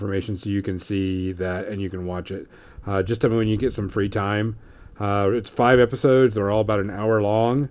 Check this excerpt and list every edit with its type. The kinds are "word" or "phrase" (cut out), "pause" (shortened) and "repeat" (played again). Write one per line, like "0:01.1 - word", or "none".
none